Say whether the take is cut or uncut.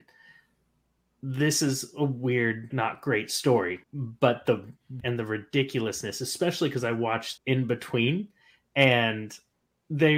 cut